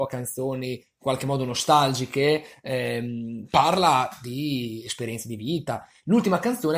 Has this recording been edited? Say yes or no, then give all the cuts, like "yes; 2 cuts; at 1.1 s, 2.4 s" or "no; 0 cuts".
no; 0 cuts